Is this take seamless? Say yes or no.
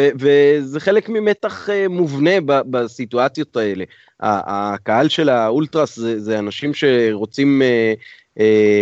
yes